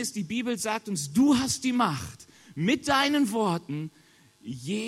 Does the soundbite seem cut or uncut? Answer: uncut